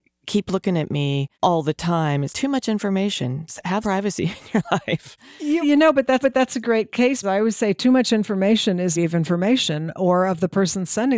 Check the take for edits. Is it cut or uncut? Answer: cut